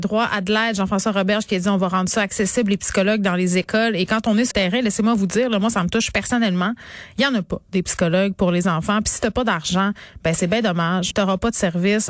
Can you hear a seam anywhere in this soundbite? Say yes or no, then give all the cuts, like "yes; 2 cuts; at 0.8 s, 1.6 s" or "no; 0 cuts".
yes; 2 cuts; at 4.5 s, 11.1 s